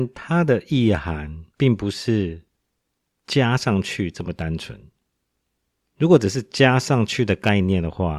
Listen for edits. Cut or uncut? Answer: cut